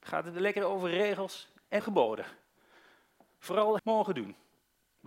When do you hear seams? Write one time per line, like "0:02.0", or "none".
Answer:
0:01.8
0:03.8